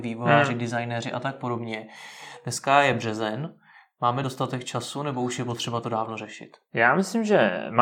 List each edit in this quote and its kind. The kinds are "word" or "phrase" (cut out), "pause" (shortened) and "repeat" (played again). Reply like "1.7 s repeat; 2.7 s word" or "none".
none